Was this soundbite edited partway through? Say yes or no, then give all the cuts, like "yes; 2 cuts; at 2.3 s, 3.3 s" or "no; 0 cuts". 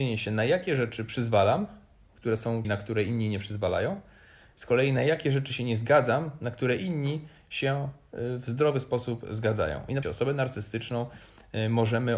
yes; 2 cuts; at 2.6 s, 10.0 s